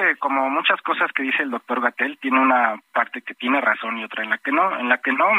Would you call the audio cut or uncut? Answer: uncut